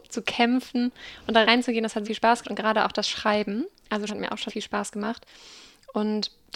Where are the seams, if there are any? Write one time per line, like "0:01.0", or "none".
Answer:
0:01.4
0:02.0
0:02.4
0:04.1
0:04.5